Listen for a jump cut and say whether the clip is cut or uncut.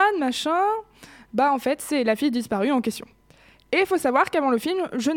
uncut